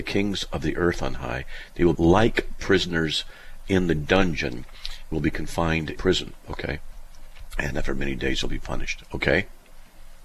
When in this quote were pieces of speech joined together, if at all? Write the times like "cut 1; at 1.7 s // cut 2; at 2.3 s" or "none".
cut 1; at 1.9 s // cut 2; at 5.1 s // cut 3; at 6.0 s

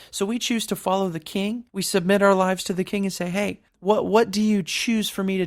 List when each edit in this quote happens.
cut 1; at 1.7 s // cut 2; at 3.7 s

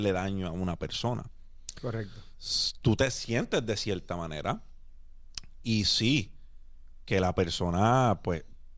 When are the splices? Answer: none

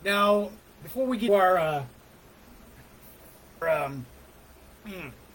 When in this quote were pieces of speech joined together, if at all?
cut 1; at 1.3 s // cut 2; at 3.6 s

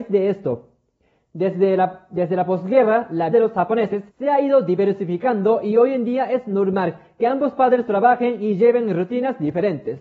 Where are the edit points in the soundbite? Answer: cut 1; at 3.3 s // cut 2; at 4.1 s

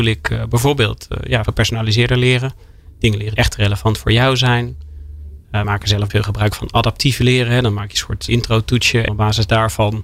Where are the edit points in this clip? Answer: cut 1; at 1.4 s // cut 2; at 3.4 s // cut 3; at 5.6 s // cut 4; at 6.1 s // cut 5; at 8.3 s // cut 6; at 9.1 s

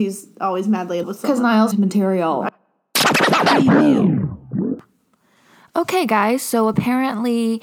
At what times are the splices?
cut 1; at 1.0 s // cut 2; at 1.7 s

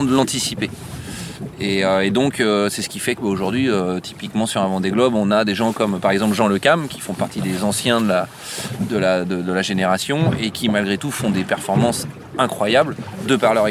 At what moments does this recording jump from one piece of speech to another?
none

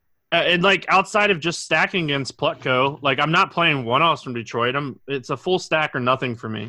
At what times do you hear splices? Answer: none

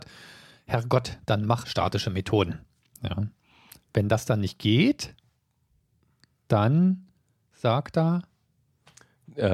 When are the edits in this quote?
cut 1; at 1.6 s

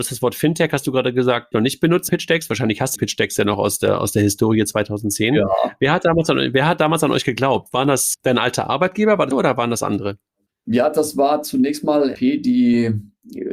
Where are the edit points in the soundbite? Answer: cut 1; at 1.5 s // cut 2; at 2.1 s // cut 3; at 3.0 s // cut 4; at 8.1 s // cut 5; at 9.3 s // cut 6; at 12.1 s

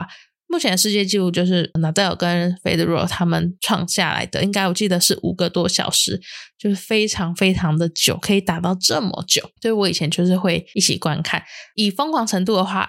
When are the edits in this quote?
cut 1; at 9.6 s

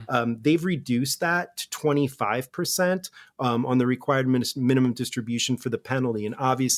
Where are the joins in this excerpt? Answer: none

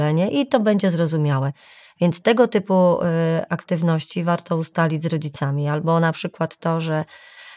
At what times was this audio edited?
none

